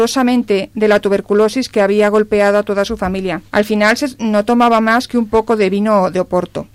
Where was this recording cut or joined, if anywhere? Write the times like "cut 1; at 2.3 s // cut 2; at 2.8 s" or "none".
cut 1; at 3.5 s